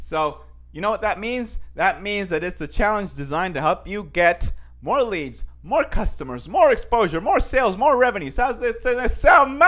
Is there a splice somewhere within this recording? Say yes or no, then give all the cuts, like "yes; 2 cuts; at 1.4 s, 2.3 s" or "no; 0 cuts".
no; 0 cuts